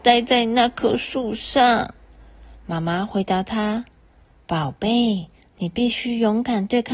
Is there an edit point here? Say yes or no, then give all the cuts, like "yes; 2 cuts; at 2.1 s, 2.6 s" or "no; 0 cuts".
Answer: no; 0 cuts